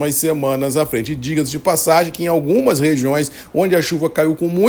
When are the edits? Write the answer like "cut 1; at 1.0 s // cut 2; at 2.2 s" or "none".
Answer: none